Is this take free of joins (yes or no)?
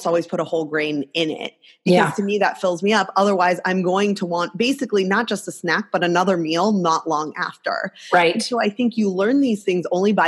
yes